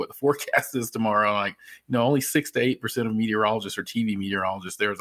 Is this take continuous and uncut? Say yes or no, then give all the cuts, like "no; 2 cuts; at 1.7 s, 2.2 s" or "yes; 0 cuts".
yes; 0 cuts